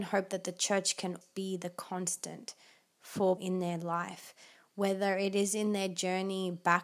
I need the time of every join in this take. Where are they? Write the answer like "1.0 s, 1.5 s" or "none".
1.2 s, 3.4 s